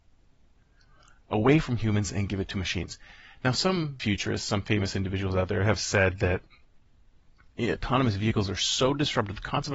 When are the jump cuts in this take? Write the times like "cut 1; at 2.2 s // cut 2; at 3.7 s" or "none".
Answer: cut 1; at 4.0 s